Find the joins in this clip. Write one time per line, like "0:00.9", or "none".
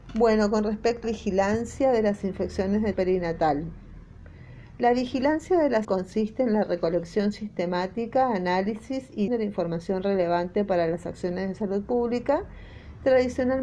0:01.0
0:02.9
0:05.8
0:09.3